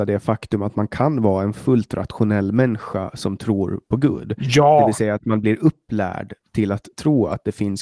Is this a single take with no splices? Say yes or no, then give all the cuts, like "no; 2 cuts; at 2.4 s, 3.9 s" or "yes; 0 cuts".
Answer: yes; 0 cuts